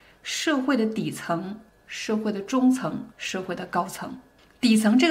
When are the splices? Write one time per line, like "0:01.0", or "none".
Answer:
0:01.7
0:03.1